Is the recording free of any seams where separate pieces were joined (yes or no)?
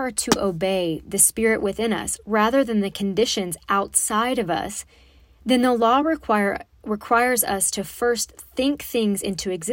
yes